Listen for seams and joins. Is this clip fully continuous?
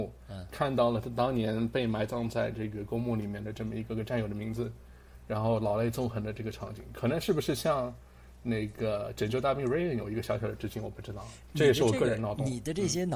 yes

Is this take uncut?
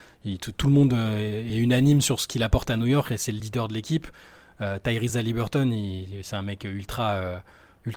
yes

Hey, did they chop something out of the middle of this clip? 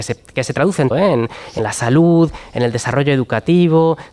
yes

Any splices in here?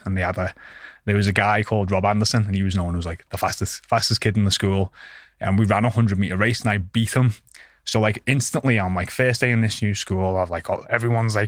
no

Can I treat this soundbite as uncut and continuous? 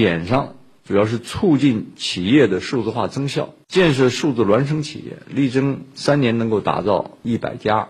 no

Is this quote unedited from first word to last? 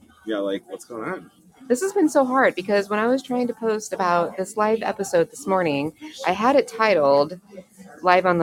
yes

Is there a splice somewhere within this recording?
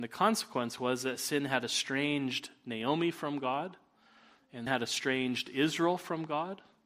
yes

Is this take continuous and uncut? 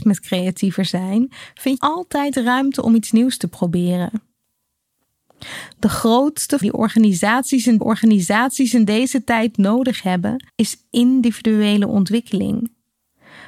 no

